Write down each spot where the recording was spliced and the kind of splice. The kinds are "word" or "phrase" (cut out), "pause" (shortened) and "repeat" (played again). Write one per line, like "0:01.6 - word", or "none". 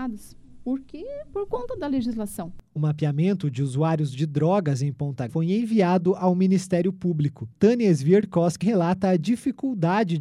0:02.8 - phrase
0:05.3 - word
0:07.5 - pause
0:08.6 - word

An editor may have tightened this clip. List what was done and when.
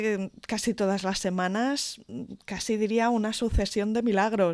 none

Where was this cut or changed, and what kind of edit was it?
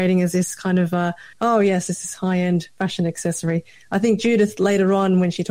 0:01.3 - pause

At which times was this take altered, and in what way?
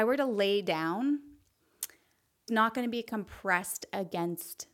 0:02.5 - word

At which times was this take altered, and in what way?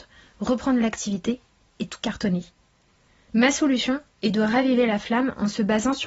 none

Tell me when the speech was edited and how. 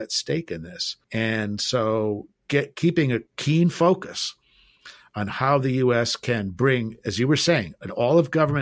0:01.0 - pause
0:03.3 - pause

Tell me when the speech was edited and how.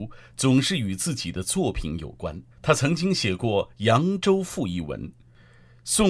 0:02.5 - pause

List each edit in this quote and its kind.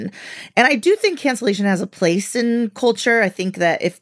none

